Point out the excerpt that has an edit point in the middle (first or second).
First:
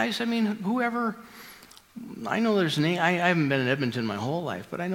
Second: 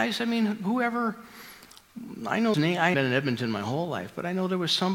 second